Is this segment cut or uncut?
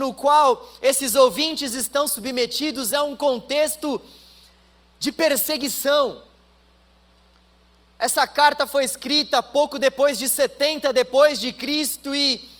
uncut